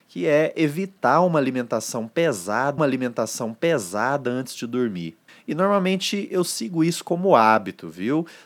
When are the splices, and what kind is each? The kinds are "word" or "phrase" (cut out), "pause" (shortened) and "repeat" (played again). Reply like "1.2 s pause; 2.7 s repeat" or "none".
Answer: 2.8 s repeat; 5.3 s pause